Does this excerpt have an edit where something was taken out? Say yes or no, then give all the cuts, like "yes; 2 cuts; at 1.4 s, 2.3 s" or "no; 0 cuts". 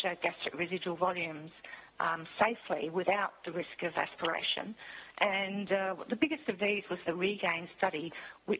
no; 0 cuts